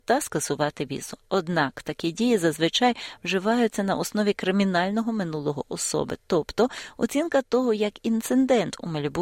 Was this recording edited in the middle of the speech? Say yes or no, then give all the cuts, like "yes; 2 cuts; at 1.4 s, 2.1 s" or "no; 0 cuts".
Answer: no; 0 cuts